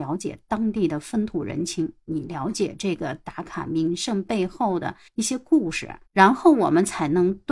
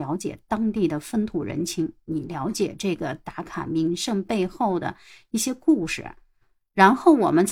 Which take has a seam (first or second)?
first